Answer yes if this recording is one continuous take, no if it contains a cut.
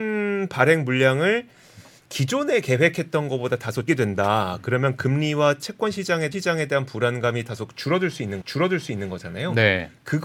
no